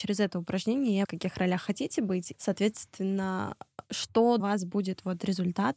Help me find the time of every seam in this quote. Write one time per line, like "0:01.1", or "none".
0:01.0
0:02.3
0:04.4